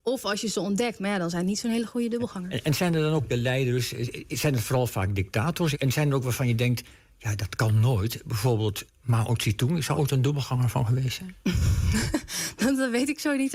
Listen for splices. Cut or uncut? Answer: cut